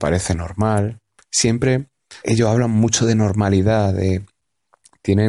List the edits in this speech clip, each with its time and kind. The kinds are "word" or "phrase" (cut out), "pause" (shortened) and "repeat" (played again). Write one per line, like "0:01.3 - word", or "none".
0:02.2 - word